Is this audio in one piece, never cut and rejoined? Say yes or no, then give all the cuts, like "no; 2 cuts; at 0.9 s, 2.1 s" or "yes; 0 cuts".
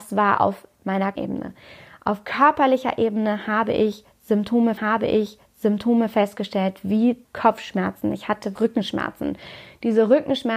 no; 4 cuts; at 1.2 s, 4.8 s, 7.2 s, 8.6 s